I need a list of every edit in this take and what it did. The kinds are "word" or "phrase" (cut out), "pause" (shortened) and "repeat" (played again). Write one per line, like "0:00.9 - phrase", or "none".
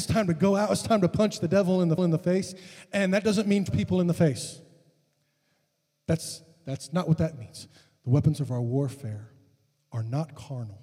0:02.0 - repeat
0:03.7 - word